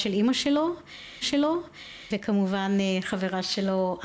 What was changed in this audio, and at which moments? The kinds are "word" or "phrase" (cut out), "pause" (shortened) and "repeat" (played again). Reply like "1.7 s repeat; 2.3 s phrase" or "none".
1.2 s repeat

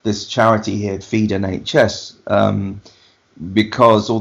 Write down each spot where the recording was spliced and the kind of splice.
1.0 s word

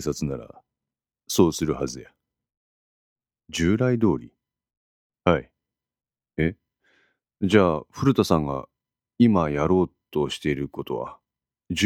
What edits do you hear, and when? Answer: none

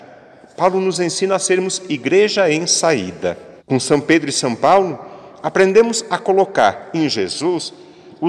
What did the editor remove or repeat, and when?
3.6 s pause

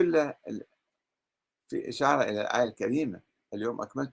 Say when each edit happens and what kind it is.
none

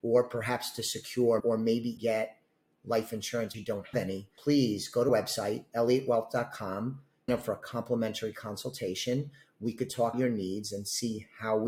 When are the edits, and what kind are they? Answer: 1.4 s word; 2.0 s word; 3.5 s word; 3.9 s word; 4.4 s word; 5.1 s word; 7.3 s word; 10.1 s word

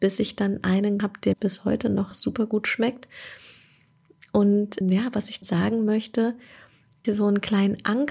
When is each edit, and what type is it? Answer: 1.0 s word; 1.3 s word; 2.1 s word; 4.8 s word; 5.4 s word; 7.0 s word

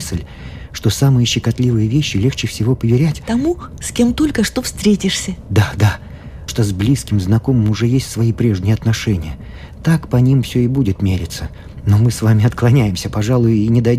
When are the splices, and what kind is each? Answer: 6.5 s word

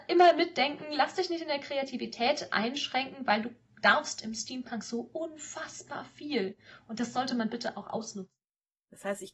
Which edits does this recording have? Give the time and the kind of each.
none

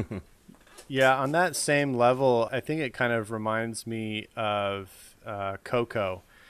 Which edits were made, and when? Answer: 2.5 s word

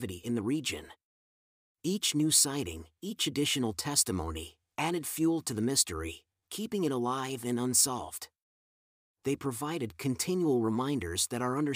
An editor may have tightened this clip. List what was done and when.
none

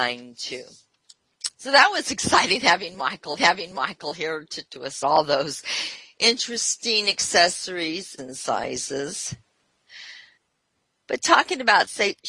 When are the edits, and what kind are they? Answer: 1.5 s pause; 3.4 s repeat; 4.7 s word; 5.0 s word; 8.2 s word; 10.4 s pause

